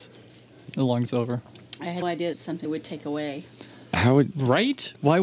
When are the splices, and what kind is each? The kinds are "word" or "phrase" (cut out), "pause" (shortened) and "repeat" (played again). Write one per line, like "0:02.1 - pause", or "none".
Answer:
0:01.0 - word
0:02.0 - word
0:02.3 - word
0:02.6 - word